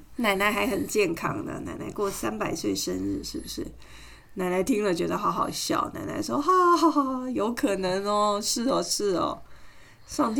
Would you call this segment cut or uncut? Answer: uncut